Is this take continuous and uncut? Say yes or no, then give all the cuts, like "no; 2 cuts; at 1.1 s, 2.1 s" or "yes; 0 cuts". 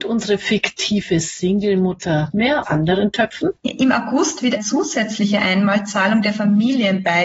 no; 4 cuts; at 2.3 s, 2.6 s, 3.6 s, 4.6 s